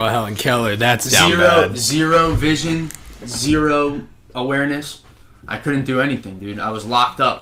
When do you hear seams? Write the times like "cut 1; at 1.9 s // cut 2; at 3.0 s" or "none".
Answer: none